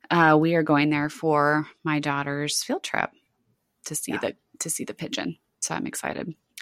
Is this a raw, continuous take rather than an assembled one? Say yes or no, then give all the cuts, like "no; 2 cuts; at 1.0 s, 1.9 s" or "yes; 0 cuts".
yes; 0 cuts